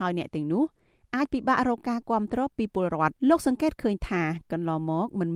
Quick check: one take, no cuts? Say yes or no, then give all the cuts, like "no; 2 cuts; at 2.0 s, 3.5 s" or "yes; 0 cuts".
no; 1 cut; at 3.2 s